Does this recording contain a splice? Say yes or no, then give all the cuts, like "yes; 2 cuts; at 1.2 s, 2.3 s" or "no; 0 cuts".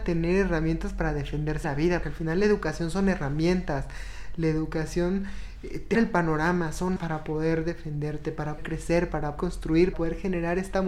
yes; 7 cuts; at 1.6 s, 2.0 s, 5.9 s, 7.0 s, 8.6 s, 9.4 s, 9.9 s